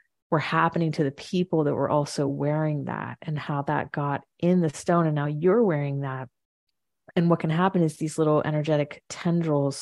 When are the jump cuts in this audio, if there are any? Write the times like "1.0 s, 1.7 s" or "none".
none